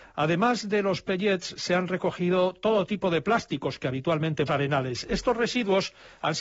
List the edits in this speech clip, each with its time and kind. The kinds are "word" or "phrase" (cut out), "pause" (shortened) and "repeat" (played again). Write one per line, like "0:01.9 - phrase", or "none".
0:04.5 - phrase